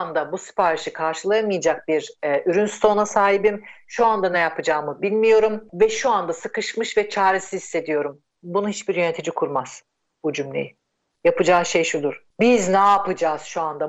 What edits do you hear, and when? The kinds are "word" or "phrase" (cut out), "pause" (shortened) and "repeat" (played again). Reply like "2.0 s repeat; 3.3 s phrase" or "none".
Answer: none

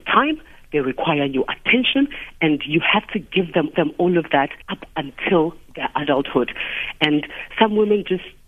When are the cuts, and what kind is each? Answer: 3.7 s repeat; 4.6 s pause

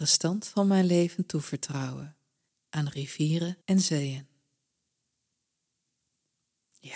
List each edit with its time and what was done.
2.5 s pause; 3.6 s pause

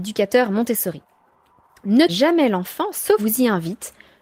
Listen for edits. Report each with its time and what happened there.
2.1 s word; 3.2 s word

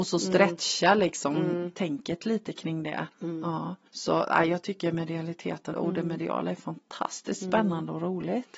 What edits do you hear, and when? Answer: 3.9 s pause; 5.7 s word

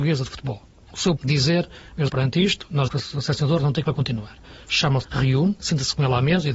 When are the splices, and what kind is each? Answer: 1.2 s word; 2.1 s word; 2.9 s word; 3.8 s word; 5.0 s word

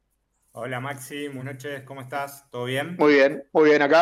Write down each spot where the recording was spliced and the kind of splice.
1.4 s word

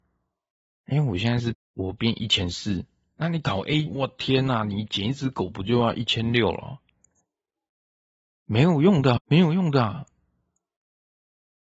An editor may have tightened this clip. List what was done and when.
1.5 s phrase; 3.9 s word; 9.2 s word

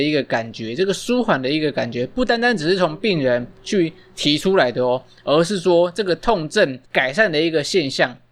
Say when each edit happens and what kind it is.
6.9 s pause

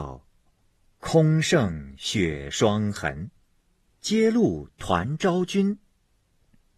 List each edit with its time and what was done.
3.9 s pause

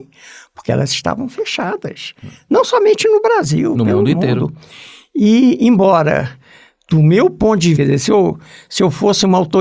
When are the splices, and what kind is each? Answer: 3.7 s word; 7.8 s word

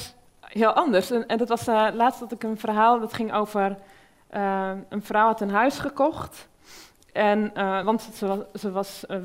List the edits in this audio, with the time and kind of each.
none

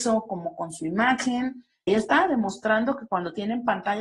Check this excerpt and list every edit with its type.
1.9 s phrase

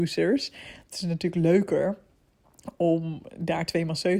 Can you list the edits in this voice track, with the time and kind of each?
none

